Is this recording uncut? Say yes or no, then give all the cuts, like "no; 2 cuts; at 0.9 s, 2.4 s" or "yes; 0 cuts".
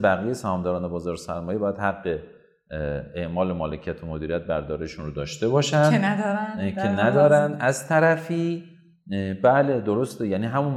yes; 0 cuts